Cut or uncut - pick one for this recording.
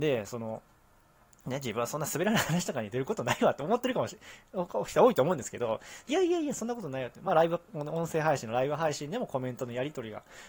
uncut